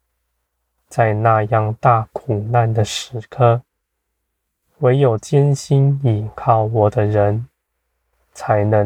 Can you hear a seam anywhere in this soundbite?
no; 0 cuts

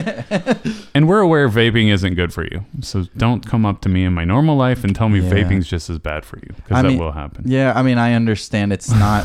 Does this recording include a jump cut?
no; 0 cuts

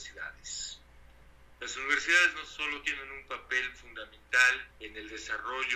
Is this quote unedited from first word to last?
no; 1 cut; at 4.7 s

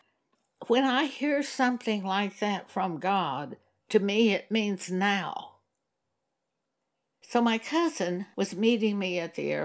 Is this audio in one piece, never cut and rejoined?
yes; 0 cuts

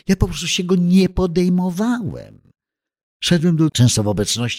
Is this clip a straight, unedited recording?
no; 1 cut; at 3.7 s

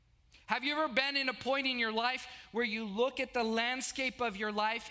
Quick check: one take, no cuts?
yes; 0 cuts

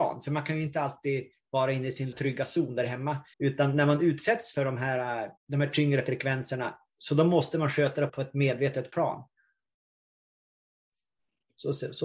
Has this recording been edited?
yes; 4 cuts; at 2.1 s, 3.3 s, 5.4 s, 8.1 s

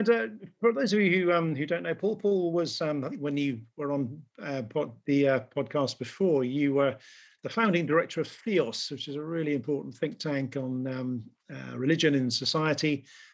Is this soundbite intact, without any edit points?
yes; 0 cuts

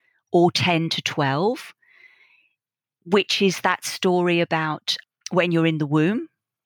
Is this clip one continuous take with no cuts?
yes; 0 cuts

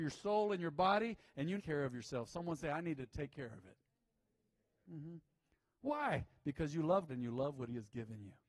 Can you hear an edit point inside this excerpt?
yes; 2 cuts; at 1.6 s, 7.1 s

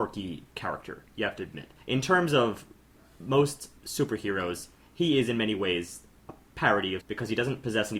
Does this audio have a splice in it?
yes; 4 cuts; at 1.1 s, 1.8 s, 3.8 s, 7.0 s

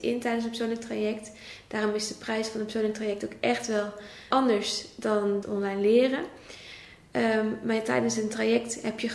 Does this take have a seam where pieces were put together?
yes; 2 cuts; at 4.3 s, 5.4 s

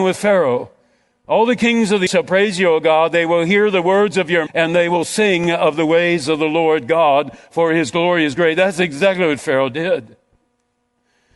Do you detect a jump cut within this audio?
yes; 2 cuts; at 2.1 s, 4.5 s

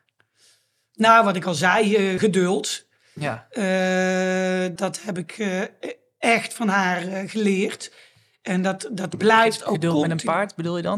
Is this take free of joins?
no; 2 cuts; at 2.2 s, 4.8 s

